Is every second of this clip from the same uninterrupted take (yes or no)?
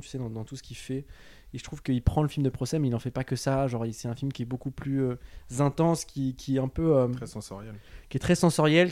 yes